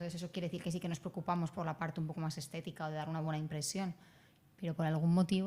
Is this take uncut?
yes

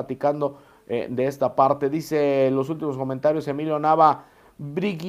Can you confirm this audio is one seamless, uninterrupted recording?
yes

